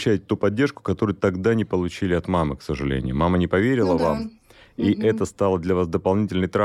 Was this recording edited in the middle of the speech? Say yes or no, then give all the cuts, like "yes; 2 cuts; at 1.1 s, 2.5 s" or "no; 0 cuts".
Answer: no; 0 cuts